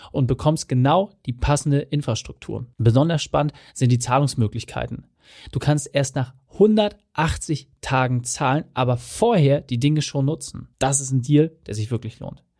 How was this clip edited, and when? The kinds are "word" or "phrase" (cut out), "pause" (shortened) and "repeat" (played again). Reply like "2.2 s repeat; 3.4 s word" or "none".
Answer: 2.7 s pause; 10.7 s pause